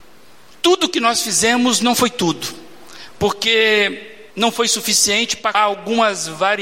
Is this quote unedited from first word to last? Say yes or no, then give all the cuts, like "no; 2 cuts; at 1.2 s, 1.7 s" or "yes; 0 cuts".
no; 2 cuts; at 4.3 s, 5.5 s